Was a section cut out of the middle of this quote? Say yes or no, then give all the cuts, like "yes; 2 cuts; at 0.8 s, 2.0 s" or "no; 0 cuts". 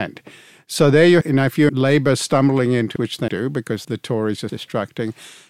yes; 6 cuts; at 1.2 s, 1.7 s, 3.0 s, 3.3 s, 3.8 s, 4.5 s